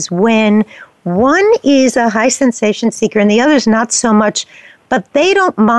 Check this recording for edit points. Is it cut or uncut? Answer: uncut